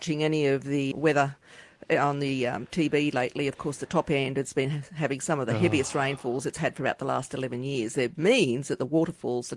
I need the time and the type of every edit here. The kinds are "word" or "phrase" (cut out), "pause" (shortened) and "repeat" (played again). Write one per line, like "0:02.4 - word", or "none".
0:00.9 - word
0:08.1 - phrase